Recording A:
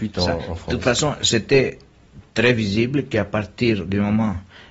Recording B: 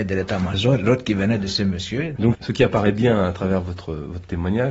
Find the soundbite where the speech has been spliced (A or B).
A